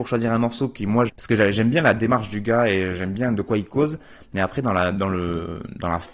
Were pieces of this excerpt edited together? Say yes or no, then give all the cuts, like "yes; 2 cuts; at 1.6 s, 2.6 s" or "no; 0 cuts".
yes; 1 cut; at 1.1 s